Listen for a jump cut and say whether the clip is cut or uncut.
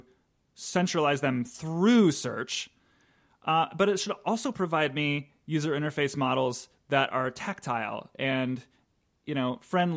uncut